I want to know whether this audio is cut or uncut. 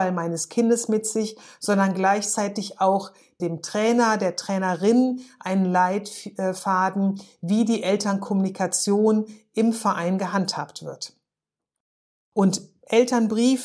uncut